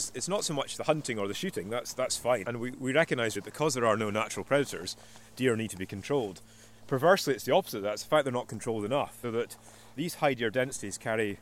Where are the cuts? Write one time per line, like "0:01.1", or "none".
0:02.4
0:03.4
0:09.2